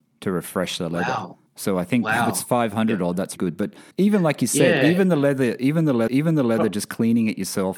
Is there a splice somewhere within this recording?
yes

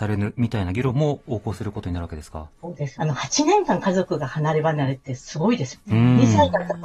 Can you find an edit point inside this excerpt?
yes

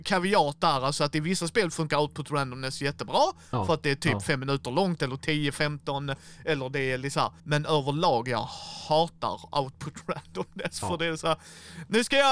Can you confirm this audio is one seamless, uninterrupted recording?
no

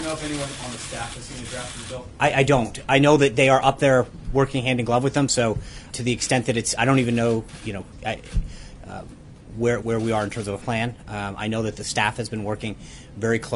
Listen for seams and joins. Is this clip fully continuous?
no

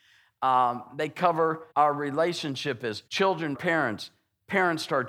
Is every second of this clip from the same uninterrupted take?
no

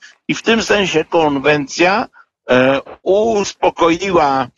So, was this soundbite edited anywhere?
yes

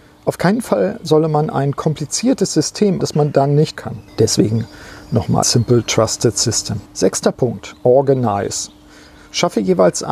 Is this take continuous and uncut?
no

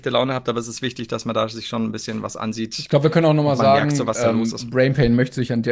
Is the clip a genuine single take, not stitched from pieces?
yes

